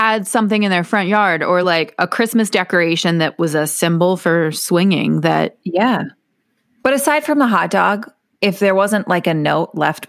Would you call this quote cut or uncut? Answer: uncut